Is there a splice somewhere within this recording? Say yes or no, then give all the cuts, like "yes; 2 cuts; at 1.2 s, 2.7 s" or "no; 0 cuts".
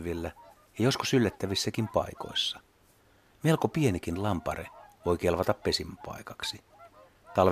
no; 0 cuts